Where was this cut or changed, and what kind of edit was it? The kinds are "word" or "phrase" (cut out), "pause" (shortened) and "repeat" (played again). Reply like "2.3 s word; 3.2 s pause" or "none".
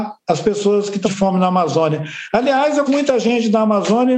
1.0 s word; 2.9 s word